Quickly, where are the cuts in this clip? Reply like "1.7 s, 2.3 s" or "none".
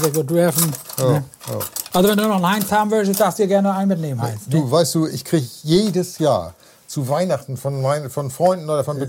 none